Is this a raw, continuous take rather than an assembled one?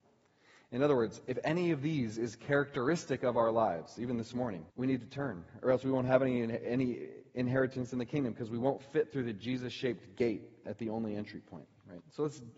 no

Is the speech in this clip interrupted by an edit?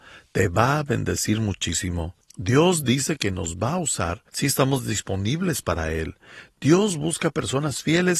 yes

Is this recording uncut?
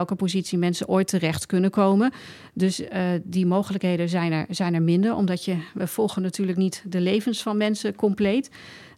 yes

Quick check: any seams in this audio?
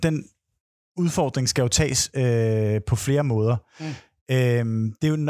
no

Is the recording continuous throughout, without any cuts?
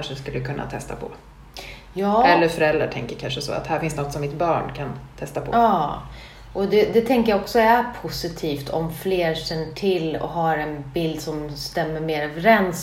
yes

